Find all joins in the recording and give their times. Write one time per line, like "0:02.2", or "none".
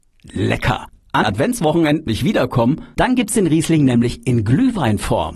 0:01.2
0:02.1
0:03.0